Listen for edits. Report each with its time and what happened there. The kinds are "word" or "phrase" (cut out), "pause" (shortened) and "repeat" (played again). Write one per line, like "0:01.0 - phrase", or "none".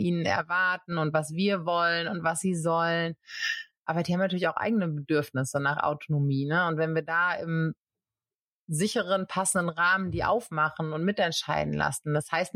none